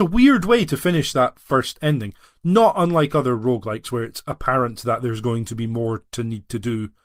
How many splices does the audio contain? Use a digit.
0